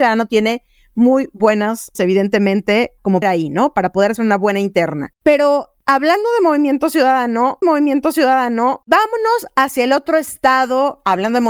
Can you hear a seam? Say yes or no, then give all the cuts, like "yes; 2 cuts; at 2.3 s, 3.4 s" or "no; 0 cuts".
yes; 3 cuts; at 1.9 s, 3.2 s, 7.6 s